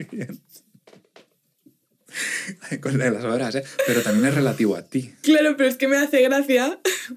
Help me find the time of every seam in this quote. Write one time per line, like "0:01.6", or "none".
none